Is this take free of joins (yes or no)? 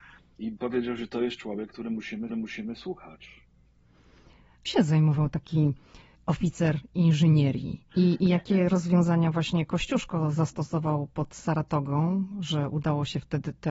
no